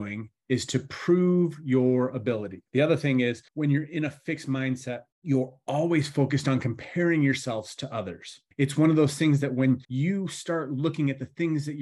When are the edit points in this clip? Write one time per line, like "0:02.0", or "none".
0:02.7
0:03.5
0:05.1
0:08.5
0:09.8